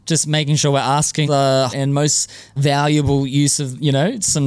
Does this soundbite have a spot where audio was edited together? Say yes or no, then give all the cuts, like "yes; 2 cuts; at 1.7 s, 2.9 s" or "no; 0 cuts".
yes; 3 cuts; at 1.2 s, 1.7 s, 2.6 s